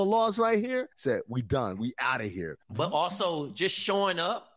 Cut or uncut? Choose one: cut